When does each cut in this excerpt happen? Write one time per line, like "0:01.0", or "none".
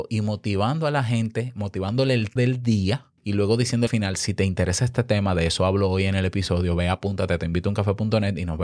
0:02.4
0:03.2
0:03.9